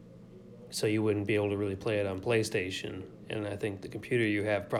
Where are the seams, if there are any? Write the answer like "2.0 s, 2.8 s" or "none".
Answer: none